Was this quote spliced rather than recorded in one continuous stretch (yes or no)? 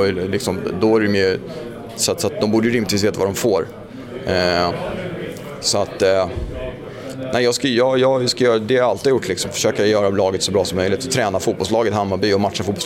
no